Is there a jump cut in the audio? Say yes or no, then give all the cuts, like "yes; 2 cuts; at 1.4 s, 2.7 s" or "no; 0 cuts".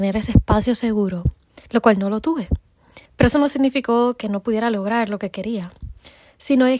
yes; 2 cuts; at 1.7 s, 3.1 s